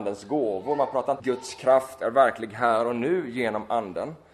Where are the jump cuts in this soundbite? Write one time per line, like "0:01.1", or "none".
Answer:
0:01.2